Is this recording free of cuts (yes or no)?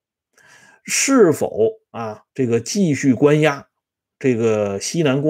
no